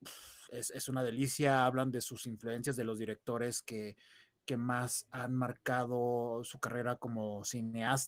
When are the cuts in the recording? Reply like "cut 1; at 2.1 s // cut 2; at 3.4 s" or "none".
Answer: none